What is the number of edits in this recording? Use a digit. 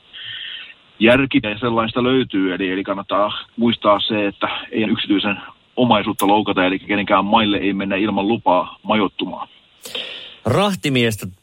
3